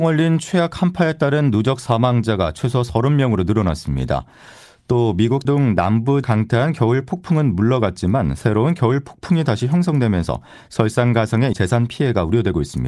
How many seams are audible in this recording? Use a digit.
3